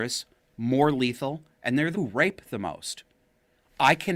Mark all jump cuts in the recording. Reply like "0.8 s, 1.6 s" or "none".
1.9 s